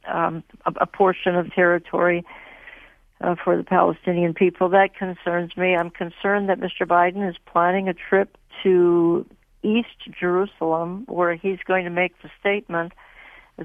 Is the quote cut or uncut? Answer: uncut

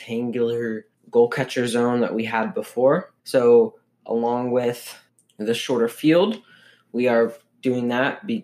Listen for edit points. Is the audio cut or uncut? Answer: cut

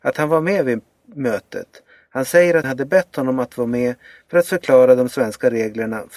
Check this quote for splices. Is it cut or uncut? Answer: cut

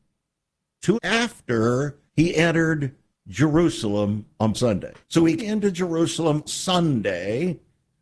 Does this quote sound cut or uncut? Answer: cut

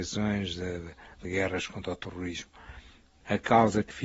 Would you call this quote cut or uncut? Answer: uncut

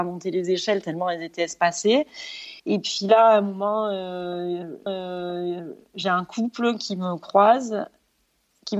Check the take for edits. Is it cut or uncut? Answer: cut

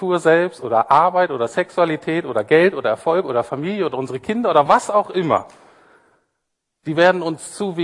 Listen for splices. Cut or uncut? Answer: uncut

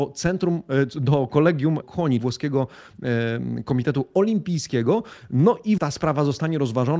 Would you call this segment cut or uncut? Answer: cut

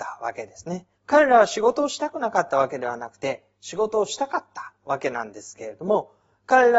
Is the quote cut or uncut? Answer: cut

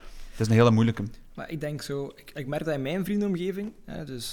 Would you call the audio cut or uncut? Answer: uncut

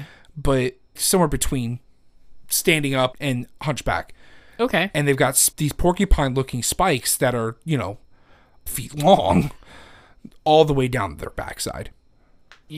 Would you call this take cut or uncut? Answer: cut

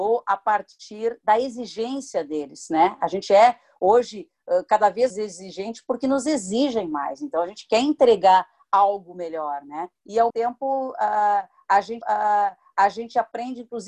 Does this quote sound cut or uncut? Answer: cut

